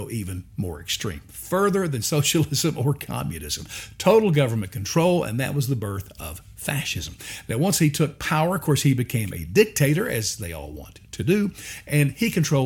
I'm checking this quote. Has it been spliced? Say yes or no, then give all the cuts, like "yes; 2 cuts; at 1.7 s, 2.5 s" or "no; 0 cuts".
no; 0 cuts